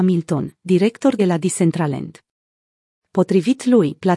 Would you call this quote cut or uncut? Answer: cut